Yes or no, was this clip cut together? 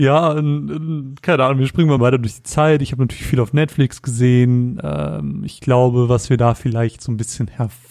yes